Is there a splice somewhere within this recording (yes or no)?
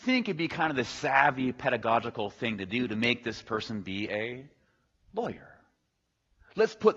no